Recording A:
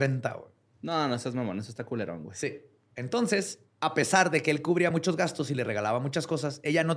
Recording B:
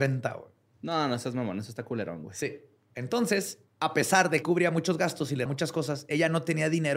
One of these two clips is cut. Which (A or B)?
B